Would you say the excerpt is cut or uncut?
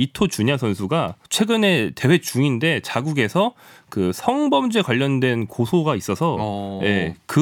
cut